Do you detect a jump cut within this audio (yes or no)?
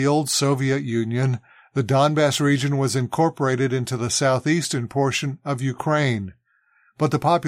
no